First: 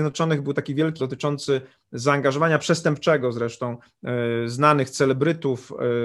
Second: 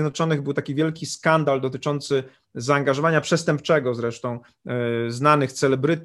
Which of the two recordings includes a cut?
first; 1 cut; at 1.0 s

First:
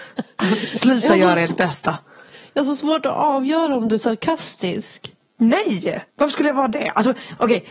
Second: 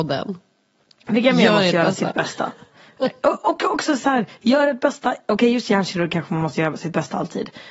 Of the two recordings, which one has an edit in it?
first; 1 cut; at 6.1 s

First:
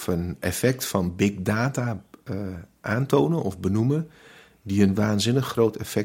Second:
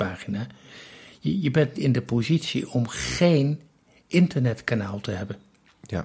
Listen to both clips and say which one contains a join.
second; 1 cut; at 1.8 s

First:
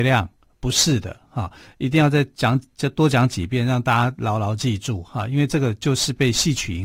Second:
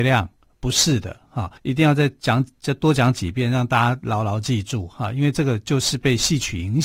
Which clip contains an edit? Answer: second; 1 cut; at 1.6 s

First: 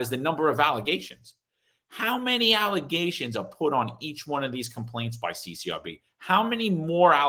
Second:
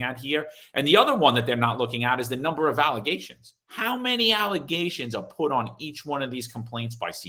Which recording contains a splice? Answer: second; 1 cut; at 3.6 s

